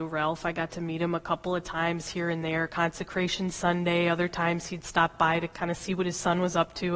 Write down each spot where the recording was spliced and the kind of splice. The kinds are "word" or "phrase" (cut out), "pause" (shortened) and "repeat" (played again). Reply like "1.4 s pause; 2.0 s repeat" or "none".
5.5 s pause